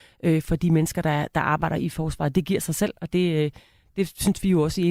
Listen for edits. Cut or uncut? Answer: uncut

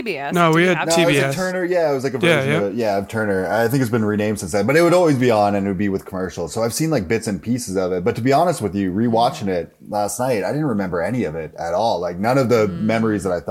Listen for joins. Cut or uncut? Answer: uncut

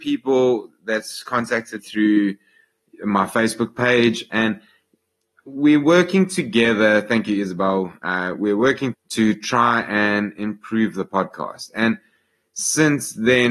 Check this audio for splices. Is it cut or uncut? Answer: cut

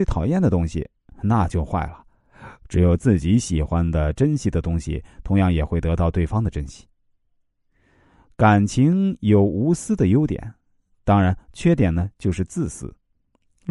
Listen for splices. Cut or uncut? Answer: uncut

